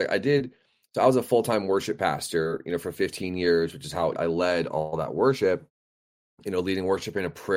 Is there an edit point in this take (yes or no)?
yes